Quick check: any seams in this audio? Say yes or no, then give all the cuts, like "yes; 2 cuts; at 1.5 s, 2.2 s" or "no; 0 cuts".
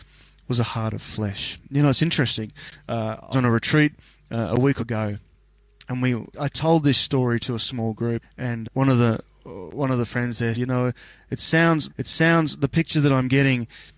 yes; 7 cuts; at 3.3 s, 4.8 s, 6.3 s, 8.2 s, 8.6 s, 10.5 s, 11.9 s